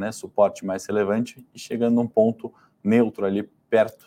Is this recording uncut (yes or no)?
yes